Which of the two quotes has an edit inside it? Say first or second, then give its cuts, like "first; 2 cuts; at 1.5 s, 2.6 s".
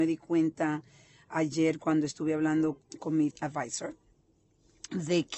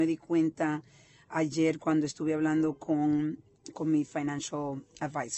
first; 2 cuts; at 2.8 s, 3.3 s